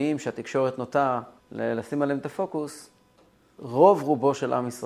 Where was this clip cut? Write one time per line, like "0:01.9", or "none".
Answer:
0:01.4
0:03.6